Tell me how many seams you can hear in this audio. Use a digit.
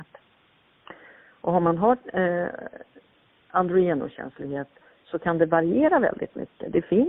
0